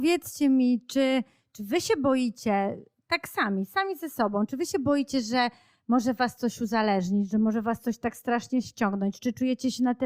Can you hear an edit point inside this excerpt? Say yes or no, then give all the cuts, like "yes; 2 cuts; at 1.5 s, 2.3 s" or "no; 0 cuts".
no; 0 cuts